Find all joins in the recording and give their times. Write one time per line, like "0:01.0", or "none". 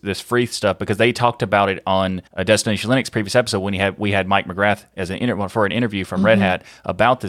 0:02.3